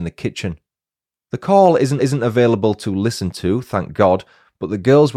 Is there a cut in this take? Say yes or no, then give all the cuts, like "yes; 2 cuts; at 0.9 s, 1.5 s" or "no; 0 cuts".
yes; 1 cut; at 2.0 s